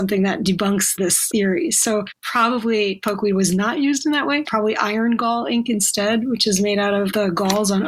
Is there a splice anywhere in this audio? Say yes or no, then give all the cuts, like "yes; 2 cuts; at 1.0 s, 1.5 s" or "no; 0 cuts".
yes; 1 cut; at 4.4 s